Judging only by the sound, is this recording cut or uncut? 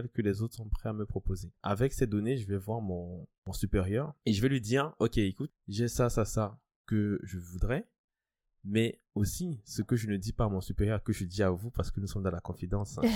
cut